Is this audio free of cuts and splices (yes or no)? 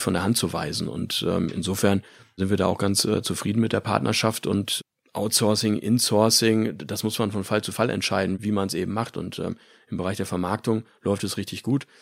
yes